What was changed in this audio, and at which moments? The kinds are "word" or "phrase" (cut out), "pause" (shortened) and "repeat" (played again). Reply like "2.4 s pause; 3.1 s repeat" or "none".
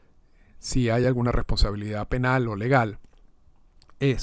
none